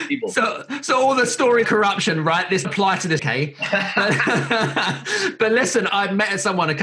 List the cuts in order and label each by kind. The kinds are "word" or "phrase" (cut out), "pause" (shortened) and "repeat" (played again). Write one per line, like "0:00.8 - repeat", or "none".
0:01.6 - word
0:02.6 - word
0:03.2 - word
0:05.9 - word